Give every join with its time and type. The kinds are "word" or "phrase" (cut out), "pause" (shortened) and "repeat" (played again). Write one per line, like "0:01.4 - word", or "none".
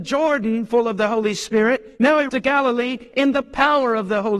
0:02.3 - word